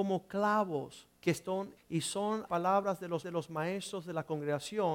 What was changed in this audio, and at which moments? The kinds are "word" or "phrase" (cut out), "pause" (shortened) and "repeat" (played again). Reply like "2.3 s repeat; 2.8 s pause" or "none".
1.2 s pause; 1.8 s word; 2.5 s word; 3.2 s repeat